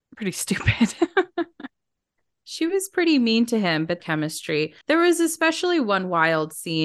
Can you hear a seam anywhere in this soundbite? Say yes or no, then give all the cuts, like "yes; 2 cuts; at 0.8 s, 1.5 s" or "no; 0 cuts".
yes; 2 cuts; at 4.0 s, 4.8 s